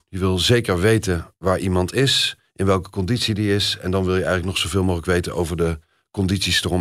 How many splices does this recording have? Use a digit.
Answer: 0